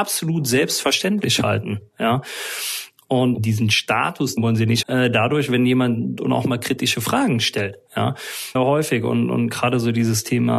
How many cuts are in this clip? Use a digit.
4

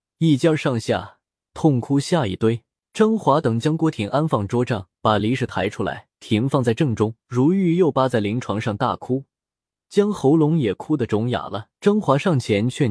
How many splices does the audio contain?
5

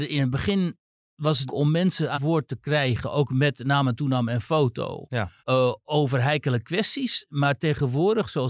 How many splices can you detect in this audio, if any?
3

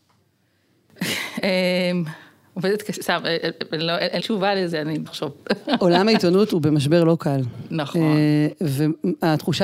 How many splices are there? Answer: 2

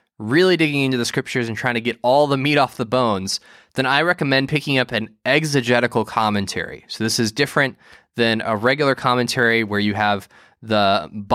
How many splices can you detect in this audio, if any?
0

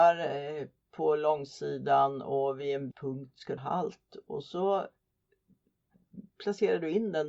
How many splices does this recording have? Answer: 2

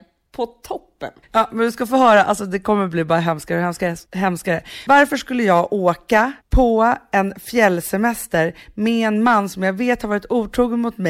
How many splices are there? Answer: 3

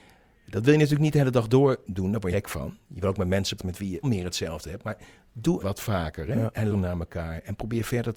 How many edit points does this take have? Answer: 5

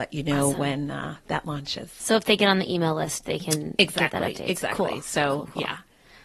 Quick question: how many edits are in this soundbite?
0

